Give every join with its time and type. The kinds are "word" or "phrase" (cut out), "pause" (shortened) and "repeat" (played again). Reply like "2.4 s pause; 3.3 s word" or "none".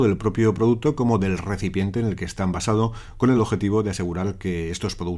none